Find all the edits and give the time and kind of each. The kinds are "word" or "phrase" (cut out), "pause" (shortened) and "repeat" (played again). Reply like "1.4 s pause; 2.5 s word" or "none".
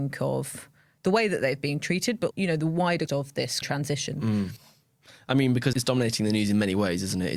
2.3 s word; 3.1 s word; 3.6 s word; 5.7 s word